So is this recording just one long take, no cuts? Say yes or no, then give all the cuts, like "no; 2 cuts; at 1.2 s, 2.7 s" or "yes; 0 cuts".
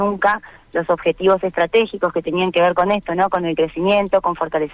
yes; 0 cuts